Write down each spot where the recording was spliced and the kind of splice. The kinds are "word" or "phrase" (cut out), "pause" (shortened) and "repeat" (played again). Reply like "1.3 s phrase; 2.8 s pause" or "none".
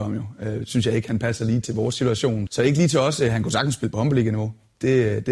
1.6 s word; 2.5 s word